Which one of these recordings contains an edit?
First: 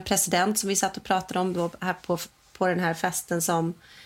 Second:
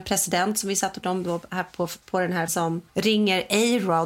second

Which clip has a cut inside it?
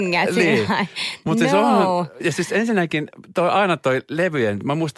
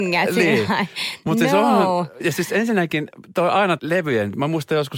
second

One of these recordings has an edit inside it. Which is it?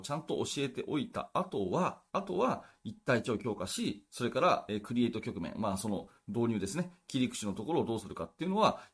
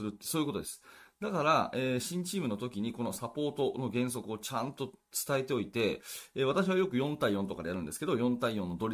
first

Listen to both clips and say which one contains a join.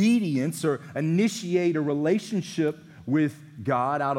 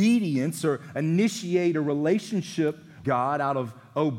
second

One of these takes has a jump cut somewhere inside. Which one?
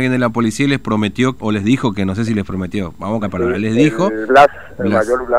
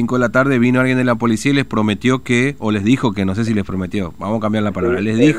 first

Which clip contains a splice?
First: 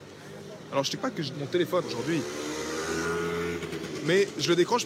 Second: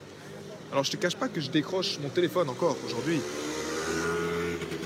first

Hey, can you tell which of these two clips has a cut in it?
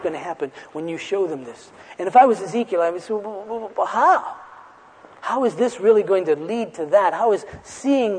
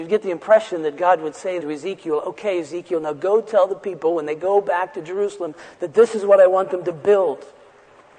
second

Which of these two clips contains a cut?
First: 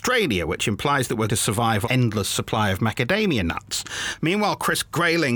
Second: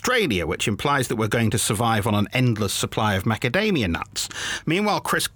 first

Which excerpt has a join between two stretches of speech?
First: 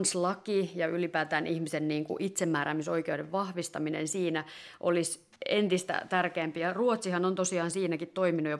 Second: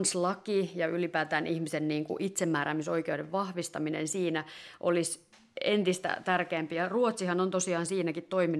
first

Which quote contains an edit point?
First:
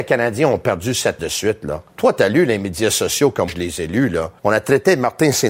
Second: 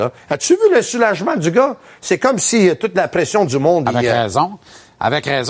first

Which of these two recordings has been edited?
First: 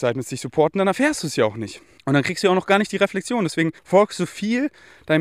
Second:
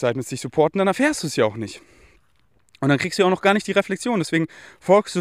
first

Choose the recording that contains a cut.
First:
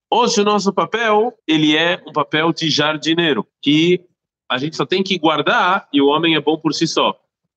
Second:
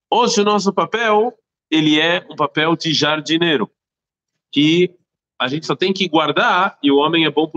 first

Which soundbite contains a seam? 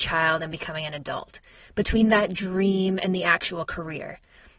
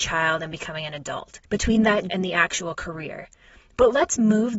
second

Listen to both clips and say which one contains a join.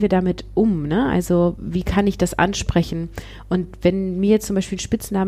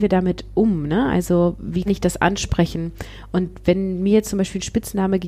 second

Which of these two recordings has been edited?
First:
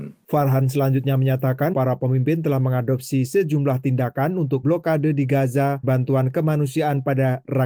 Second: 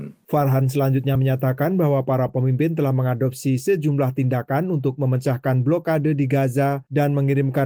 first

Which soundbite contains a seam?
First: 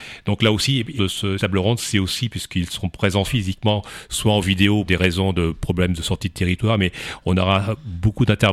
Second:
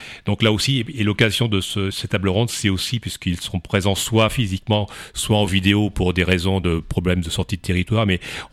first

